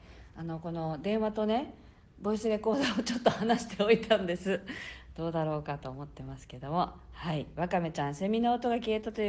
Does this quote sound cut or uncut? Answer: uncut